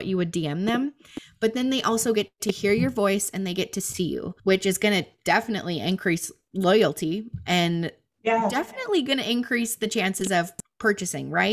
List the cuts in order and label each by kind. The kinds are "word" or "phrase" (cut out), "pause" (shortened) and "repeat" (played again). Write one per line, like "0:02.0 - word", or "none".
0:04.4 - pause